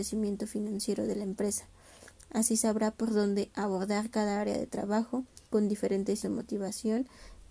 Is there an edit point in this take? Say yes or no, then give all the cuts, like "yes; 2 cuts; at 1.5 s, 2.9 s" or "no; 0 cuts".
yes; 2 cuts; at 5.5 s, 6.2 s